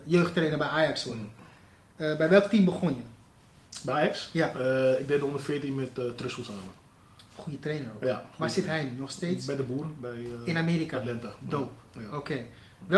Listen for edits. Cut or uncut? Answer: uncut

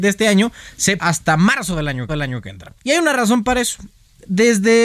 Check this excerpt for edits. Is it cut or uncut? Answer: cut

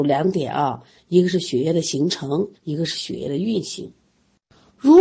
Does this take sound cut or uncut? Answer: cut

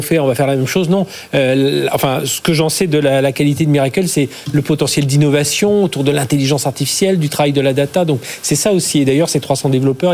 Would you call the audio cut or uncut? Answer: uncut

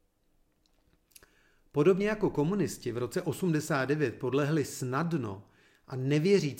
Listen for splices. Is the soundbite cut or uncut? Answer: uncut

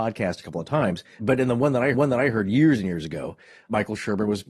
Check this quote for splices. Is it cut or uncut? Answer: cut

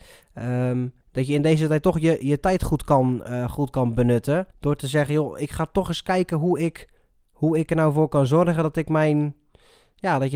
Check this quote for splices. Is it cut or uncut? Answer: cut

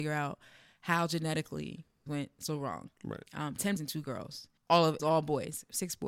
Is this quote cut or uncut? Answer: cut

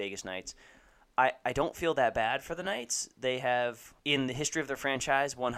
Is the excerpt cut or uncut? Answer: cut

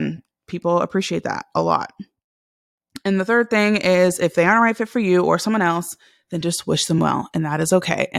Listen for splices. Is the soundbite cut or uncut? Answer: uncut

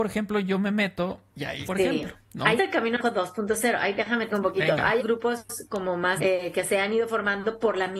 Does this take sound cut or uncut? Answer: cut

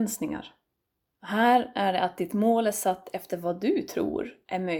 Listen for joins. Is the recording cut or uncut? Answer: uncut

